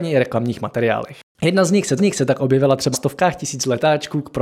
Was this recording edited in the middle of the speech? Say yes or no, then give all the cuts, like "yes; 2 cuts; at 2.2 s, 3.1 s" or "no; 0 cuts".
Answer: yes; 3 cuts; at 1.3 s, 2.0 s, 2.9 s